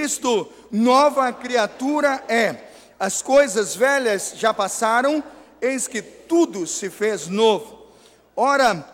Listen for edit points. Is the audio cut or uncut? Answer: uncut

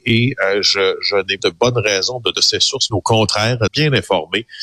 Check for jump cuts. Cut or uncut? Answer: cut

